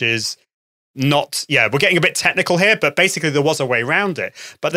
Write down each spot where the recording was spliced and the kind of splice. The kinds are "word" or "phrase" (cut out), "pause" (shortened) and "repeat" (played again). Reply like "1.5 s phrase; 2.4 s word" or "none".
none